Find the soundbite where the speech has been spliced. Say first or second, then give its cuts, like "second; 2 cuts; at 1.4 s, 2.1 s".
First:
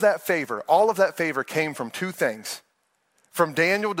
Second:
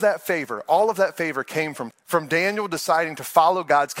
second; 1 cut; at 1.9 s